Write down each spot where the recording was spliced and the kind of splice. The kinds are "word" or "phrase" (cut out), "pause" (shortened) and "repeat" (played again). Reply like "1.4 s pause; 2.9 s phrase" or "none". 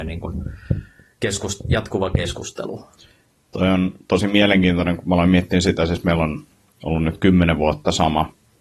none